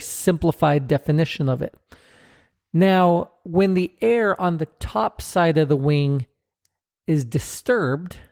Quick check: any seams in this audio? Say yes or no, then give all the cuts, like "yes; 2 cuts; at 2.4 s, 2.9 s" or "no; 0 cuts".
no; 0 cuts